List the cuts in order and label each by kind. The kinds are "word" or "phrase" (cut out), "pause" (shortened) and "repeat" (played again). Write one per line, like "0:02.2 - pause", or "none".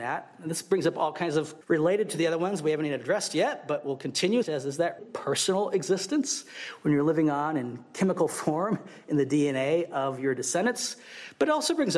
0:01.6 - word
0:04.4 - word
0:05.0 - word